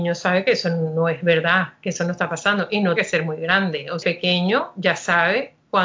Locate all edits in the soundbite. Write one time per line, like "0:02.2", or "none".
0:03.0
0:04.0